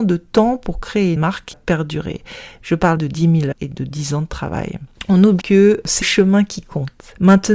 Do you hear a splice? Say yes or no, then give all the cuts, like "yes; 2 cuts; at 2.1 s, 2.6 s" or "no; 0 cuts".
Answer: yes; 6 cuts; at 1.2 s, 1.5 s, 3.0 s, 3.5 s, 5.4 s, 6.0 s